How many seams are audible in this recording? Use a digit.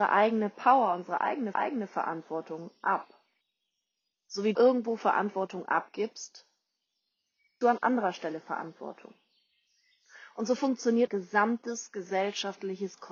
5